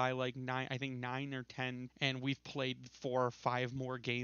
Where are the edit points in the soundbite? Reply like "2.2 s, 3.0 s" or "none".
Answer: 1.9 s